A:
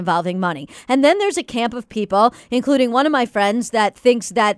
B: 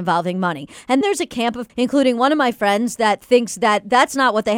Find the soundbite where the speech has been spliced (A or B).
B